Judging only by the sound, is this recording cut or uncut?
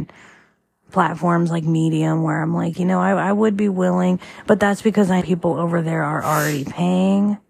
cut